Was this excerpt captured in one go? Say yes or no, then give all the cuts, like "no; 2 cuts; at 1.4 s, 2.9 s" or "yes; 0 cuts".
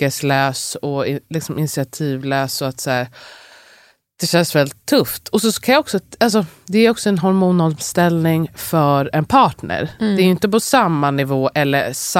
yes; 0 cuts